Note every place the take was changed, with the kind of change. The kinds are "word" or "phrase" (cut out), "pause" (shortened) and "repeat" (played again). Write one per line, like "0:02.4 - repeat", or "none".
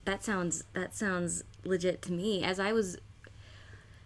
none